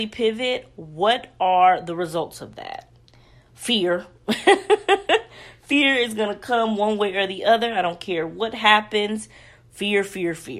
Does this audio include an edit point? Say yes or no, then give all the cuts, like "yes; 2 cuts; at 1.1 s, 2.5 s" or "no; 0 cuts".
no; 0 cuts